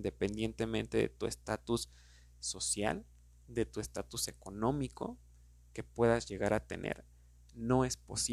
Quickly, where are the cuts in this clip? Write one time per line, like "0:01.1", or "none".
none